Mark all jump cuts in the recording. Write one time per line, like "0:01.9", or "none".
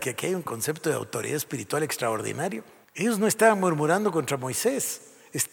0:02.8